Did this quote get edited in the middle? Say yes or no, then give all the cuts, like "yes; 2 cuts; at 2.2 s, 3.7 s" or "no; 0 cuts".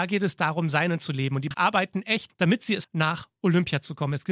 yes; 4 cuts; at 1.0 s, 1.5 s, 2.3 s, 2.8 s